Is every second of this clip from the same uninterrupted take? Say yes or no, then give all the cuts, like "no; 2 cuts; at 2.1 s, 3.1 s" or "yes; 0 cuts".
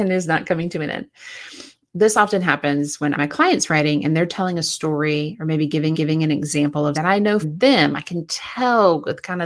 no; 5 cuts; at 1.9 s, 3.1 s, 5.9 s, 6.9 s, 7.4 s